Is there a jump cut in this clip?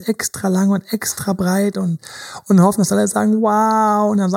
no; 0 cuts

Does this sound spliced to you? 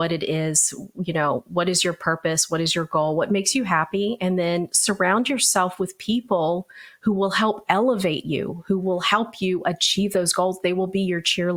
no; 0 cuts

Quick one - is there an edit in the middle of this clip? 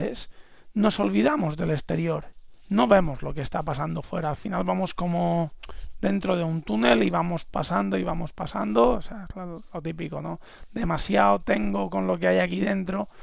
no; 0 cuts

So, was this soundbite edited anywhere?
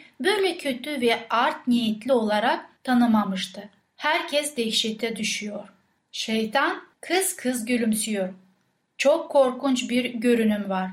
no; 0 cuts

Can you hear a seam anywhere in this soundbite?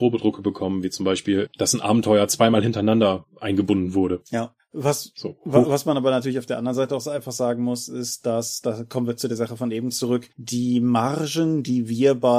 yes; 1 cut; at 10.3 s

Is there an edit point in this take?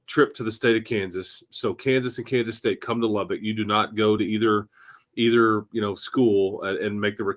no; 0 cuts

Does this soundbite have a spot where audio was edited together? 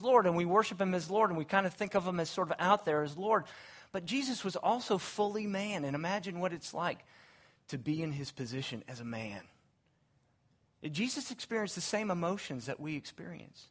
no; 0 cuts

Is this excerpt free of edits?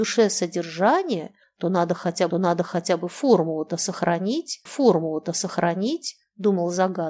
no; 2 cuts; at 2.3 s, 4.7 s

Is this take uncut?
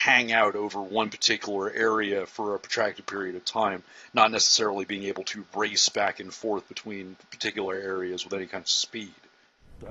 yes; 0 cuts

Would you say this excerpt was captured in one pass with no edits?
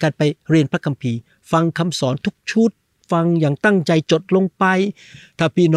yes; 0 cuts

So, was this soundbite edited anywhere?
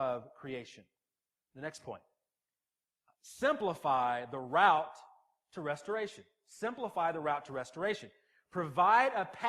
no; 0 cuts

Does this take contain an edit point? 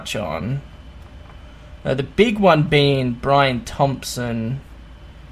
no; 0 cuts

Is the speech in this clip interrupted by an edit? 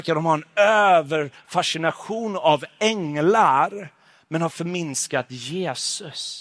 no; 0 cuts

